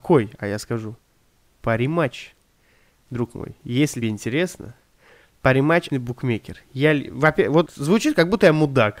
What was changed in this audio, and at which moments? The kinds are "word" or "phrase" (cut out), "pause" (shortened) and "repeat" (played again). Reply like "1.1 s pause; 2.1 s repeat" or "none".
4.0 s word; 5.9 s word; 7.7 s word